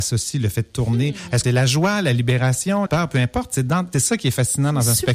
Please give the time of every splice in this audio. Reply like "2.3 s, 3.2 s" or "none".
1.4 s, 2.9 s, 3.9 s